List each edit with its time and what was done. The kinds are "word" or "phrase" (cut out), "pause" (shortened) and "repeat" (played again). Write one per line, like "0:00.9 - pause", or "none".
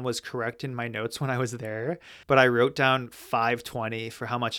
0:02.2 - pause